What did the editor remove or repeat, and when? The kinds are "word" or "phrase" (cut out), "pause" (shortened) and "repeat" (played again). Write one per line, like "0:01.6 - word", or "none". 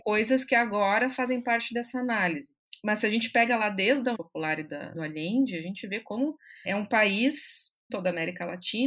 0:04.1 - word
0:04.9 - phrase
0:06.6 - word
0:07.9 - phrase